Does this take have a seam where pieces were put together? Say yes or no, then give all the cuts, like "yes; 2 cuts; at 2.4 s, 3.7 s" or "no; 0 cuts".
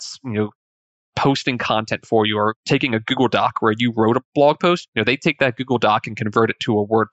no; 0 cuts